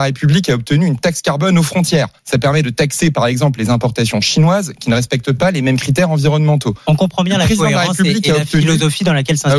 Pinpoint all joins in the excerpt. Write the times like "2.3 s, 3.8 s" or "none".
2.2 s